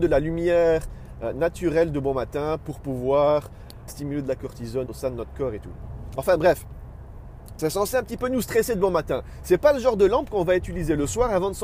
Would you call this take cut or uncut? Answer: cut